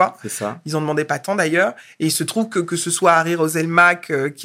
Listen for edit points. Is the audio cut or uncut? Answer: uncut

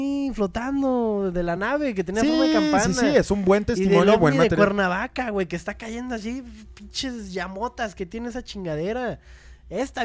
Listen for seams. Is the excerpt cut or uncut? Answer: uncut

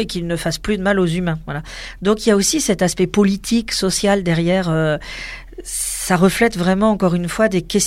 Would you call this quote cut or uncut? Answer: uncut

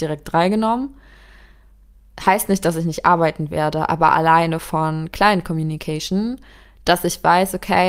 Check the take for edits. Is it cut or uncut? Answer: uncut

